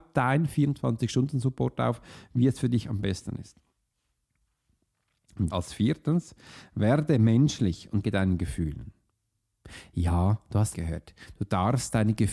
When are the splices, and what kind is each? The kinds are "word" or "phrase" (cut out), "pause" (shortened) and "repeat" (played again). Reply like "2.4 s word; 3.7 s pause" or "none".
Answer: 5.5 s word; 8.0 s word; 10.7 s word